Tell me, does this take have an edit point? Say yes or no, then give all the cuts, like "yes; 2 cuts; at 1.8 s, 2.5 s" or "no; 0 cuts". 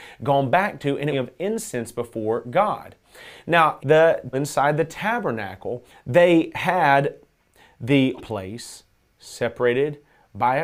yes; 5 cuts; at 1.1 s, 3.8 s, 4.3 s, 5.9 s, 8.2 s